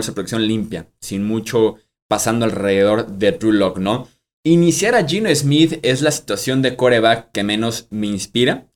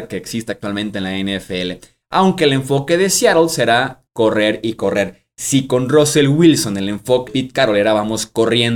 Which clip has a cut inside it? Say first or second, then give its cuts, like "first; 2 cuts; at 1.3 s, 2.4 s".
second; 2 cuts; at 4.1 s, 7.3 s